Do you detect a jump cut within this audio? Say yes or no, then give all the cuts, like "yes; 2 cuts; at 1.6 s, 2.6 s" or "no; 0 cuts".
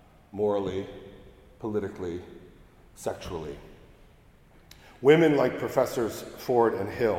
no; 0 cuts